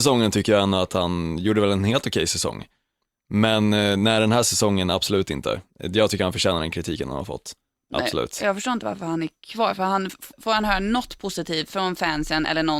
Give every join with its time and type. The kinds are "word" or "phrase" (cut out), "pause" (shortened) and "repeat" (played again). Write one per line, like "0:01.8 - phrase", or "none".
0:10.3 - pause